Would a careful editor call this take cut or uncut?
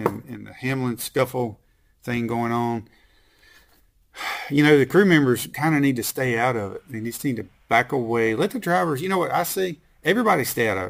uncut